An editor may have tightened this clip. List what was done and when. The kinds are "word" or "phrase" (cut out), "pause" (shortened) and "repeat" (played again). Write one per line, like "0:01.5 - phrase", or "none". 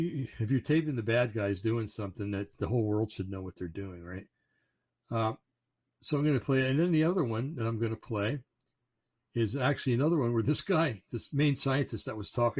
none